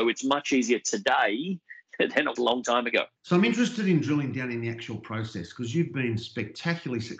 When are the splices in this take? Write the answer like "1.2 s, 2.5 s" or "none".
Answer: 2.4 s, 3.2 s

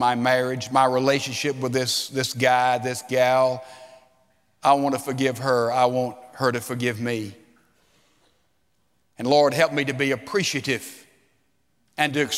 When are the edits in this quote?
none

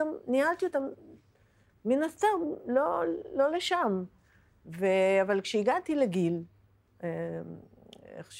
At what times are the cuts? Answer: none

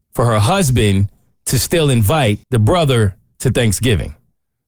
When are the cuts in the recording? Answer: 2.4 s

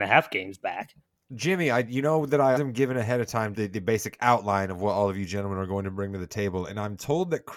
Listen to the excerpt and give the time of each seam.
1.0 s, 2.6 s, 3.5 s

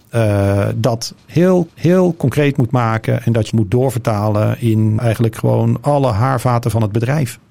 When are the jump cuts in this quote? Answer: 1.7 s, 3.5 s, 5.0 s

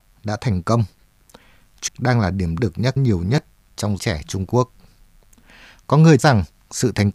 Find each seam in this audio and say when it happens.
1.9 s, 2.6 s, 3.0 s, 4.0 s, 6.2 s

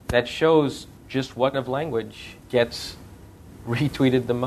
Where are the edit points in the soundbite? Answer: 1.0 s, 1.5 s, 2.4 s

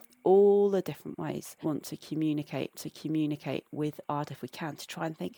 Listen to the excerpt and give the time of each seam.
1.6 s, 2.7 s, 4.2 s

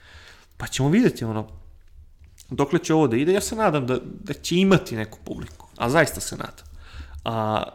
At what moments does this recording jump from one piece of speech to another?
none

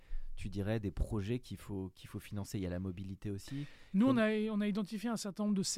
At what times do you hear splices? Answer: none

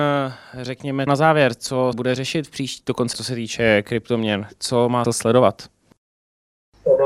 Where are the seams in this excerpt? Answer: 1.1 s, 1.9 s, 3.1 s, 5.0 s

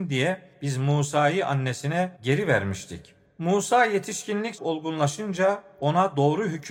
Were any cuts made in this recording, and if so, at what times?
2.2 s, 4.6 s

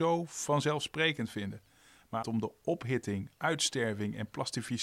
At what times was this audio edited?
2.2 s

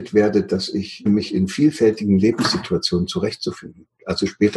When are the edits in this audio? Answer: 1.1 s

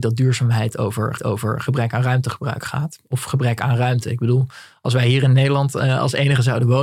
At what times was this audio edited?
1.2 s

